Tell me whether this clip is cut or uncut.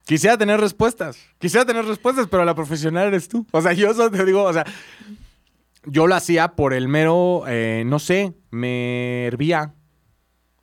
uncut